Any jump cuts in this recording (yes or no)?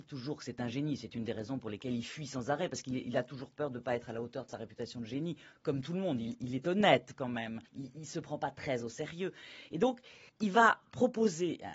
yes